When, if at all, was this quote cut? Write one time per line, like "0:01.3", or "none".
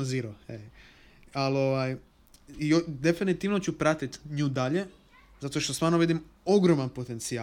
none